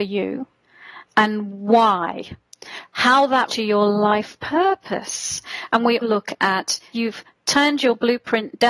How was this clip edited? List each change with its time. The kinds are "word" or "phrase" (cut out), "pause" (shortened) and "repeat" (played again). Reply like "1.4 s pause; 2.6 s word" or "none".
3.5 s word; 6.0 s word; 6.9 s word